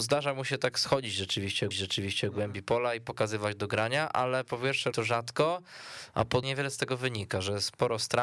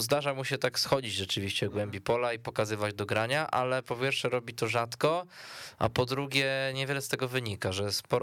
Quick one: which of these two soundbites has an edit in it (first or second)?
first